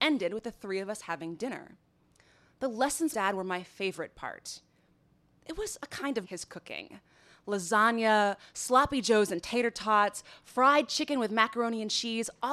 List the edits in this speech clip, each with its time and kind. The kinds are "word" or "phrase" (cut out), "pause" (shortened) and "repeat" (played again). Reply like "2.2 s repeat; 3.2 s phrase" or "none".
3.1 s word; 6.2 s word